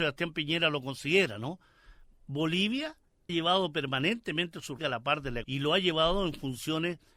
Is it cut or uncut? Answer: cut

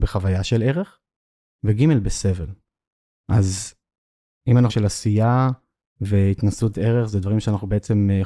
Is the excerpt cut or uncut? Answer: cut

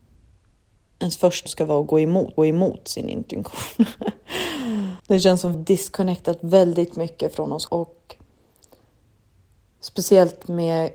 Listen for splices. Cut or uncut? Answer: cut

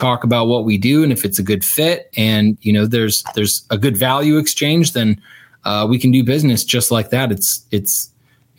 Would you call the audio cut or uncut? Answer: uncut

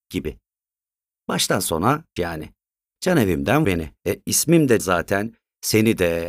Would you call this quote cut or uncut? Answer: cut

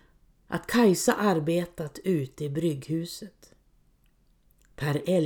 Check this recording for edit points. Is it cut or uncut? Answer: uncut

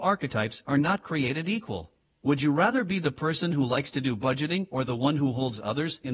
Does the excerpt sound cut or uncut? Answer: uncut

